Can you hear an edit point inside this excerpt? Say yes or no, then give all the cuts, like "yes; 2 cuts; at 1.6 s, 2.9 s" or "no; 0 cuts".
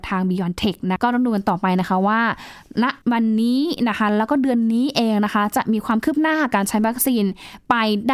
yes; 2 cuts; at 1.0 s, 3.0 s